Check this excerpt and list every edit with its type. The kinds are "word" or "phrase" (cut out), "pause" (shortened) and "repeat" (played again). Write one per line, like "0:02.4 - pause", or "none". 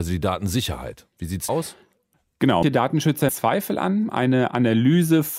0:01.5 - word
0:02.6 - word
0:03.3 - word